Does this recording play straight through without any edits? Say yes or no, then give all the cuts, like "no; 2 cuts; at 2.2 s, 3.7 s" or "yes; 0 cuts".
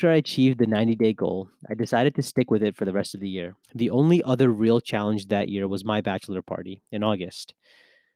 no; 1 cut; at 3.6 s